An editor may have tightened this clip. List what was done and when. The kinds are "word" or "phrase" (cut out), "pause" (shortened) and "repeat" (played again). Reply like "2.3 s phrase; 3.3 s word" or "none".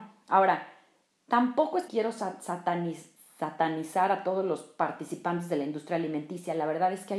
1.9 s word